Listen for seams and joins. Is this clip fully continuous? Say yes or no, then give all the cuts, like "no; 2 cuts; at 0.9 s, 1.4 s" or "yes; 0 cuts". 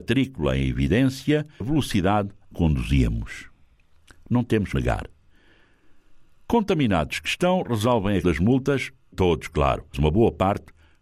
no; 6 cuts; at 1.6 s, 2.5 s, 4.7 s, 8.2 s, 9.1 s, 9.9 s